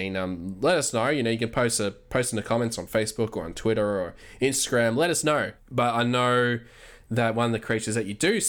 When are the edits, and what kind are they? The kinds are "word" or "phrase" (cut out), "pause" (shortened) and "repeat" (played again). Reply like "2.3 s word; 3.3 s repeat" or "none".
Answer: none